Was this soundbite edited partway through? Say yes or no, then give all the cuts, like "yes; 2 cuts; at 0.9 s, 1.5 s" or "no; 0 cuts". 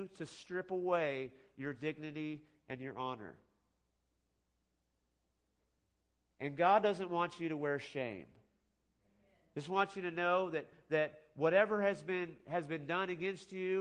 no; 0 cuts